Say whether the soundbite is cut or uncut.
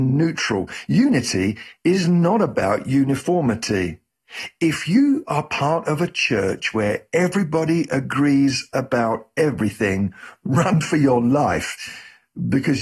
uncut